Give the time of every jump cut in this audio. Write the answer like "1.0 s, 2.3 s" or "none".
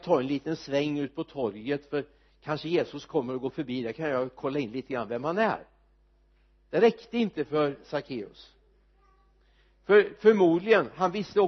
none